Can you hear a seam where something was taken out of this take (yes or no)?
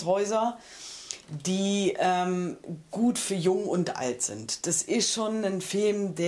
no